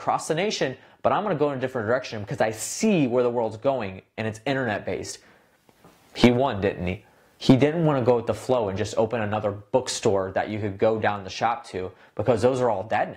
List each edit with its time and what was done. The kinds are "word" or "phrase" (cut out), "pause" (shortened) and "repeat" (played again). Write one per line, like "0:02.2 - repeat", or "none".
none